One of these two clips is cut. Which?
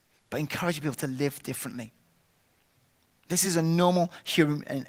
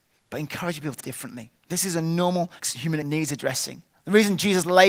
second; 4 cuts; at 1.0 s, 1.6 s, 2.6 s, 3.0 s

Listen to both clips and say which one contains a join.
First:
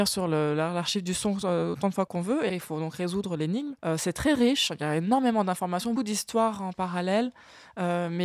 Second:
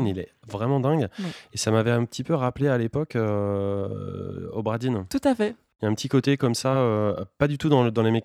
first; 4 cuts; at 2.1 s, 2.5 s, 3.8 s, 6.0 s

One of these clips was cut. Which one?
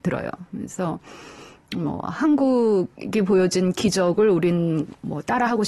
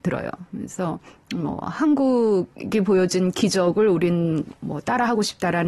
second; 1 cut; at 1.1 s

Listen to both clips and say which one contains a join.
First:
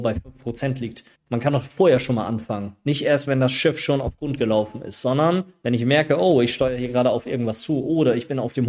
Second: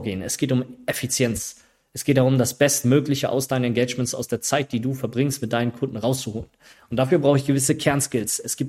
first; 1 cut; at 1.2 s

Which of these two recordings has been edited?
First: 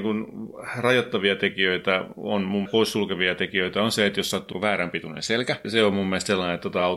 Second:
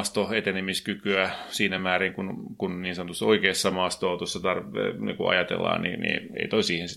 first; 3 cuts; at 2.6 s, 4.5 s, 5.6 s

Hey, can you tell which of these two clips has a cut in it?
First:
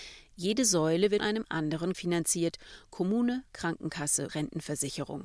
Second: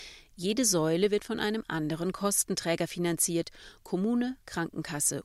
first; 3 cuts; at 1.2 s, 1.9 s, 4.3 s

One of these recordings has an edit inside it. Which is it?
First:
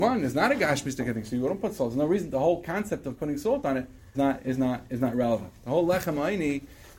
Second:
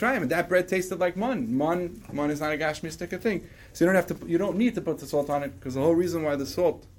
first; 1 cut; at 4.1 s

